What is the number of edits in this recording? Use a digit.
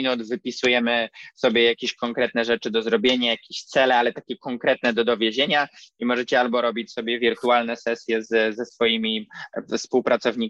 0